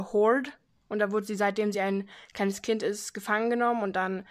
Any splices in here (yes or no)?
no